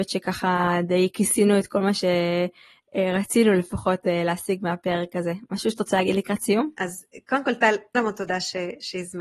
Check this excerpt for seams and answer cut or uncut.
cut